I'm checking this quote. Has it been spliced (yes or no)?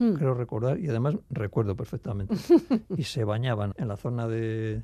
yes